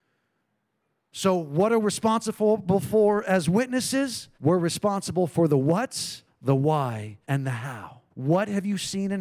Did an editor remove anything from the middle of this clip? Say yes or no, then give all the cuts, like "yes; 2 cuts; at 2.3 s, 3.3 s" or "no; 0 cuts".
yes; 5 cuts; at 1.8 s, 4.3 s, 6.3 s, 7.2 s, 8.1 s